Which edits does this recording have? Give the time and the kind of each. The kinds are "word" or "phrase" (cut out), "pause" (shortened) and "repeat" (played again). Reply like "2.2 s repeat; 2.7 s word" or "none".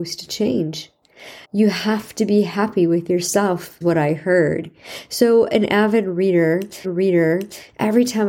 1.4 s pause; 3.8 s word; 6.8 s repeat